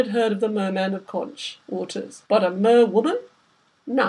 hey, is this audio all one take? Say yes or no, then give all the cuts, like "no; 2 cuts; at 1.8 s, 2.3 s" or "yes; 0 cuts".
no; 2 cuts; at 1.1 s, 2.3 s